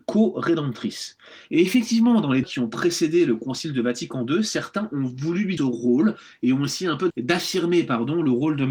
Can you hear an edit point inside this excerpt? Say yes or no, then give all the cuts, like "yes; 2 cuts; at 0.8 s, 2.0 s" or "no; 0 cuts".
yes; 3 cuts; at 2.4 s, 5.6 s, 7.1 s